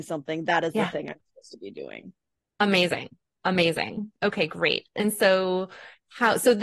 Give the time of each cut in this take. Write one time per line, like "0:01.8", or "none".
none